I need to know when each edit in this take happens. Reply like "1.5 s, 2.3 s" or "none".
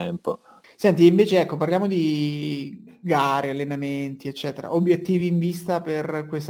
none